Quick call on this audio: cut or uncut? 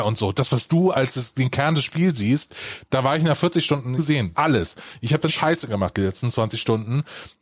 cut